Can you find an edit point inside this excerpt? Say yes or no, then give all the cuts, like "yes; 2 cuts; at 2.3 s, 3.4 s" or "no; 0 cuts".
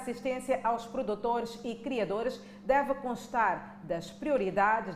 no; 0 cuts